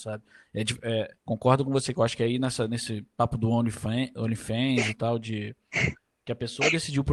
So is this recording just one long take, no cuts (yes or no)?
no